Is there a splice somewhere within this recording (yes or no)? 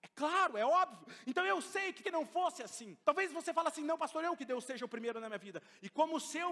yes